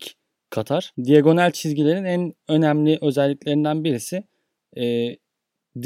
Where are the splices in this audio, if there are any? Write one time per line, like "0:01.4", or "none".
0:00.9